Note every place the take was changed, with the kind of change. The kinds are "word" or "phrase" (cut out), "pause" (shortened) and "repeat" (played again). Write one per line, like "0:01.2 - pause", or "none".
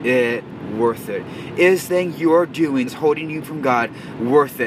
0:01.9 - word
0:02.9 - word
0:03.4 - word